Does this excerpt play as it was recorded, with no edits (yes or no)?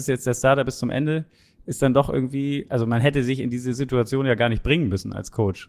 yes